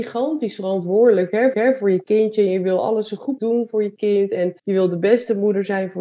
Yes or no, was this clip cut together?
yes